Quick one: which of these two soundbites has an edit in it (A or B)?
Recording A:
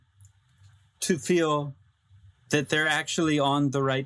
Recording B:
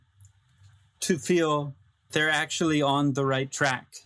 B